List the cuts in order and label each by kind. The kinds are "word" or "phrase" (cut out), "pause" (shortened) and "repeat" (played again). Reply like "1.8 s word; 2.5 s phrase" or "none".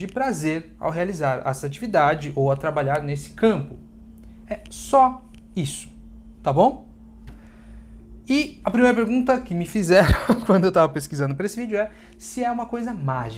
none